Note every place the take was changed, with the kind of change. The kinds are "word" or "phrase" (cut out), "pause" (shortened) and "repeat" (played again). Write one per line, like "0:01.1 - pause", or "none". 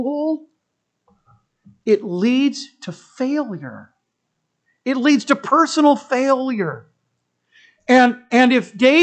none